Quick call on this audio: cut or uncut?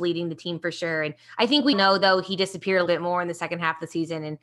cut